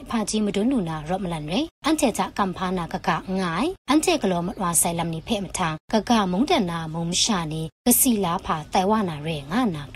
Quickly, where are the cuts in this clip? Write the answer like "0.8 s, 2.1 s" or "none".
1.7 s, 3.8 s, 5.8 s, 7.7 s